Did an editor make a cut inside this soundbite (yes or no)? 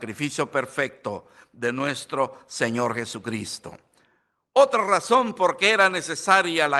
no